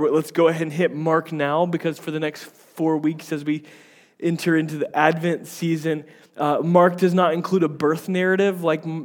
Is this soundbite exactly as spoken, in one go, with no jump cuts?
yes; 0 cuts

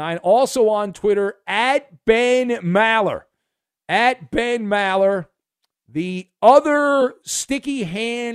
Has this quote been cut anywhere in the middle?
no; 0 cuts

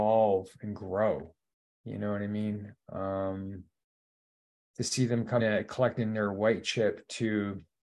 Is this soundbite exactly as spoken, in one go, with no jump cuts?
no; 1 cut; at 5.4 s

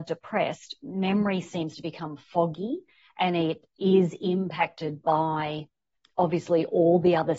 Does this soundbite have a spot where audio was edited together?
no; 0 cuts

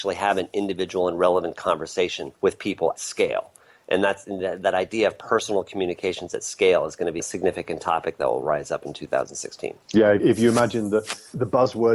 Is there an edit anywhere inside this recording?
yes; 4 cuts; at 2.3 s, 3.0 s, 7.2 s, 9.8 s

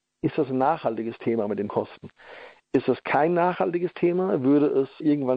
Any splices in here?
yes; 1 cut; at 1.7 s

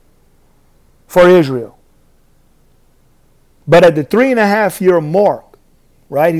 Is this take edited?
no; 0 cuts

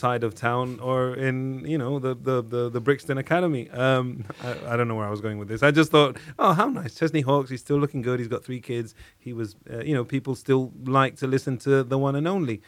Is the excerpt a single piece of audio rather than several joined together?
yes; 0 cuts

